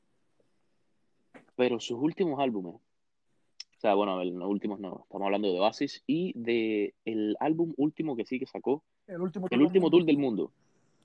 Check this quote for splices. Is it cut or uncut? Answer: cut